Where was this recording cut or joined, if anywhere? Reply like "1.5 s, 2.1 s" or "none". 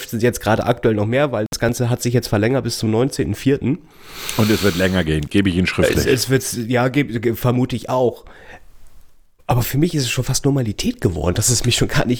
none